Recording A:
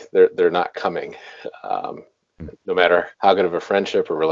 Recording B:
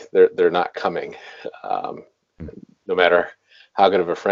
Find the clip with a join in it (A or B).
A